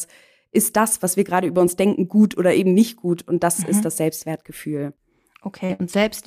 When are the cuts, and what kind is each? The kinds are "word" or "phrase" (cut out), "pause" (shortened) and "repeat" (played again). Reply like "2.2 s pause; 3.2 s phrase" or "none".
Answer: none